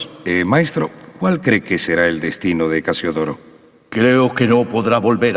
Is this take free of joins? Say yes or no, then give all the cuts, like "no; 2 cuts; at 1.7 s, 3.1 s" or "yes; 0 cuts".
yes; 0 cuts